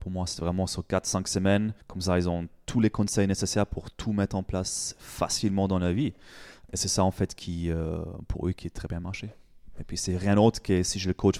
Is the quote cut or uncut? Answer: cut